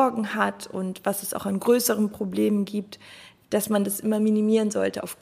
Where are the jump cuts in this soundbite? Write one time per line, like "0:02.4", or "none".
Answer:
none